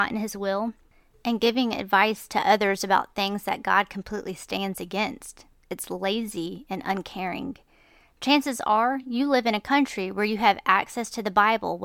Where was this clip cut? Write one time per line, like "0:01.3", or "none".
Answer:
none